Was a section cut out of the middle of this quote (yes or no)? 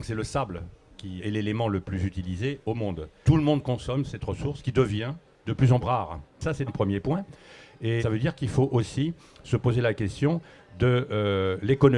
yes